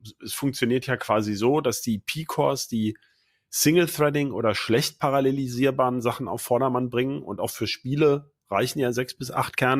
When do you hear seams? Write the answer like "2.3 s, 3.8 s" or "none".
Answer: none